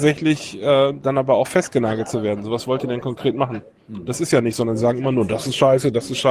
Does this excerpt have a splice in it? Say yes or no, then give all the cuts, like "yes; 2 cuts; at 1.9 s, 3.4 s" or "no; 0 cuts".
no; 0 cuts